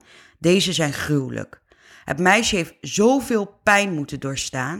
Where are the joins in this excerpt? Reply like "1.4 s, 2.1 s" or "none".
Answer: none